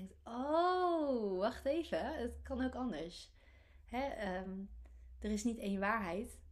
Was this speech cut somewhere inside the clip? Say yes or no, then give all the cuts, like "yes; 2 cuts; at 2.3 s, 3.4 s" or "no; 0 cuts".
no; 0 cuts